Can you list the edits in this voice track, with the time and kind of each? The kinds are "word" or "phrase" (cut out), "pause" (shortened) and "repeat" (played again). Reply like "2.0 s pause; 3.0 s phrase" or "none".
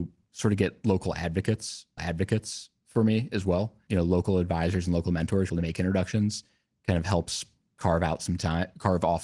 2.0 s repeat; 5.5 s phrase

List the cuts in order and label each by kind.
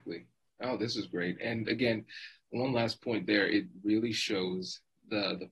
none

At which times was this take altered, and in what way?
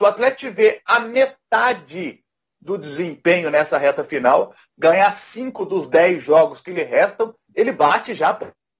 none

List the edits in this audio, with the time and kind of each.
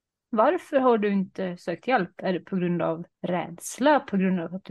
3.1 s pause

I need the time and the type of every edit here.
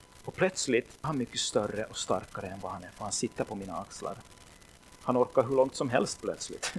1.0 s phrase; 2.8 s word

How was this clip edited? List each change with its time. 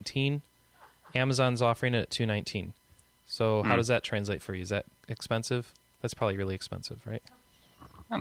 none

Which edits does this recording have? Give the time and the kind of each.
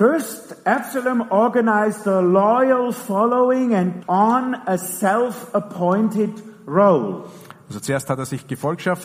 4.0 s word

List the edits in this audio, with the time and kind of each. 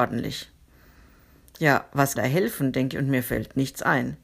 2.2 s word; 2.9 s word

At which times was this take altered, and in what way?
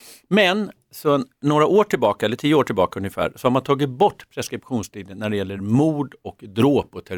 none

